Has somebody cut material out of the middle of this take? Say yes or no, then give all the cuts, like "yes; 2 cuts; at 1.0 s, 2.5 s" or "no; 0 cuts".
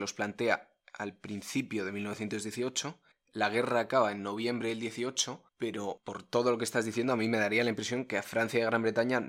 yes; 2 cuts; at 3.1 s, 5.5 s